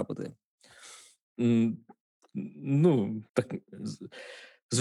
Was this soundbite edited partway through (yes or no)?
yes